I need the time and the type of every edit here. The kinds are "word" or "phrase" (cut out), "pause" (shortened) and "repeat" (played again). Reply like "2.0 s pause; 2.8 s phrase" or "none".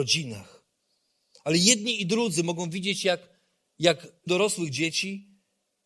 4.3 s phrase